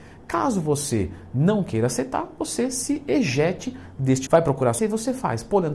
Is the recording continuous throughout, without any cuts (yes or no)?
no